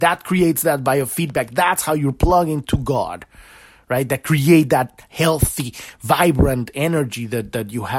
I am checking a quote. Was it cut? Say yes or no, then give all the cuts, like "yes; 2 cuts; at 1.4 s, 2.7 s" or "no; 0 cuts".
no; 0 cuts